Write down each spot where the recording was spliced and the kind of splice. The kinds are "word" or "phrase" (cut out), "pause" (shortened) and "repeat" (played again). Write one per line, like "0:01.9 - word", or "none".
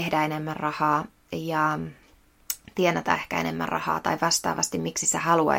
none

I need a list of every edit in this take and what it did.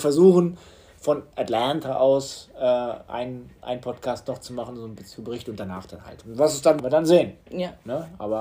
0:06.8 - phrase
0:07.4 - pause

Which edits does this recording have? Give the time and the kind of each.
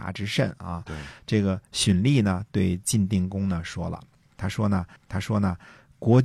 0:05.0 - repeat

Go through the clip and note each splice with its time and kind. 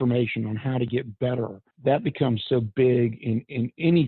0:01.7 - pause

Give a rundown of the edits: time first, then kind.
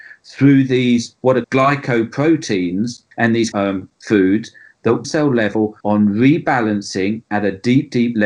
0:01.4 - word
0:03.1 - pause
0:03.5 - phrase
0:03.9 - pause
0:05.0 - phrase
0:05.8 - pause

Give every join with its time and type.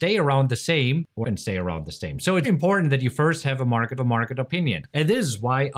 0:01.2 - word
0:02.4 - word
0:04.0 - repeat

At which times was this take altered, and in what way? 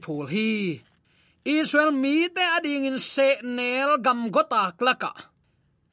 none

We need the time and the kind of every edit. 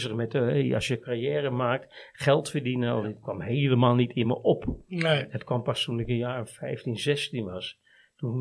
none

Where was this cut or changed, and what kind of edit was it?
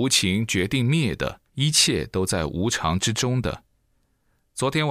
0:01.5 - pause

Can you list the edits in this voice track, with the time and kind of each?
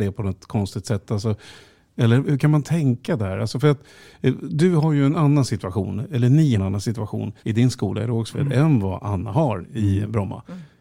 0:02.2 - word
0:06.6 - word
0:07.4 - pause

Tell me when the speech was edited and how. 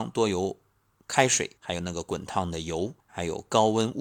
0:01.6 - pause
0:03.0 - pause

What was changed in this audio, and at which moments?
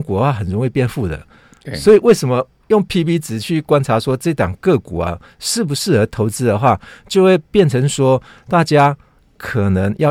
none

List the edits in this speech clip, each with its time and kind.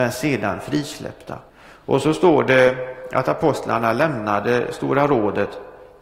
0:01.5 - pause

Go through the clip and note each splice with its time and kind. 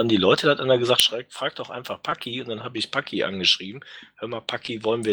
none

